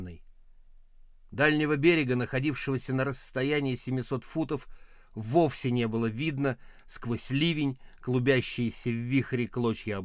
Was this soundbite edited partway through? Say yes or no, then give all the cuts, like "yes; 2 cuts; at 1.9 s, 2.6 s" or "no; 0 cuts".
no; 0 cuts